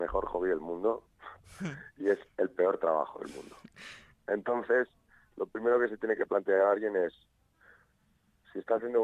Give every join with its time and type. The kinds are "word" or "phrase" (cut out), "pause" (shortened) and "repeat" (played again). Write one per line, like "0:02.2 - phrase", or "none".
none